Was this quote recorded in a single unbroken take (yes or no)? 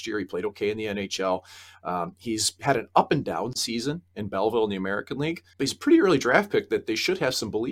no